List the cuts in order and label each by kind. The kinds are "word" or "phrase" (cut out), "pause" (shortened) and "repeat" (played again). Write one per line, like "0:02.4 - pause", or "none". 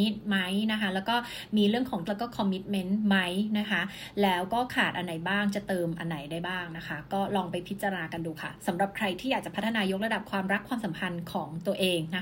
0:02.0 - word